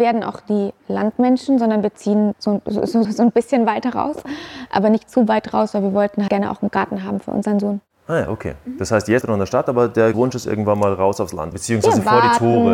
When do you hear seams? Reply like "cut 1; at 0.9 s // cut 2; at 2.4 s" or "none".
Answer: cut 1; at 2.3 s // cut 2; at 3.0 s // cut 3; at 6.3 s // cut 4; at 9.2 s // cut 5; at 10.1 s // cut 6; at 11.5 s